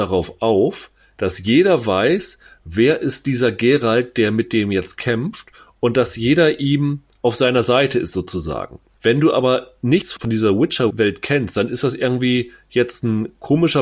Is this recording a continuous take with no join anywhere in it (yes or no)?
yes